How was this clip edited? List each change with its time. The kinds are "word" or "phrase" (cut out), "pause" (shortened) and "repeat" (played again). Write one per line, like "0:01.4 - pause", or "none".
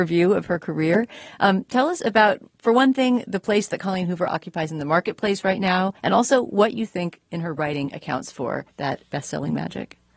0:06.0 - pause
0:08.7 - pause

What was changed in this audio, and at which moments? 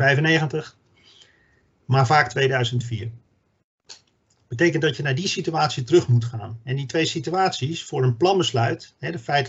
none

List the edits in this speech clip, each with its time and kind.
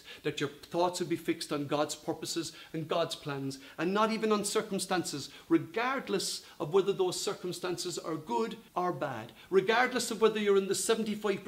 0:08.7 - pause

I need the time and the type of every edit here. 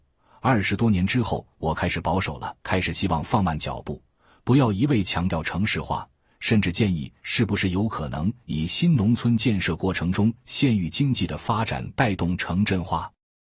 0:02.6 - pause

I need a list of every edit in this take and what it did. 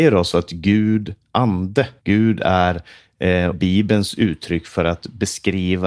0:01.3 - word
0:02.0 - pause
0:03.5 - phrase

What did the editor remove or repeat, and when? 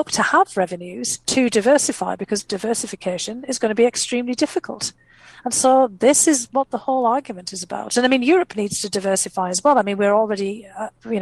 0:01.2 - pause

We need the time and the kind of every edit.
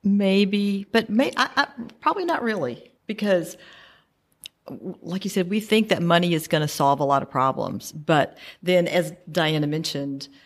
0:03.0 - pause

